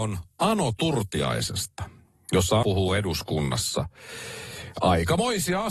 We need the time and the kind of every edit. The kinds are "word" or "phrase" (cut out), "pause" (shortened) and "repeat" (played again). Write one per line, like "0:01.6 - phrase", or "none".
0:02.6 - word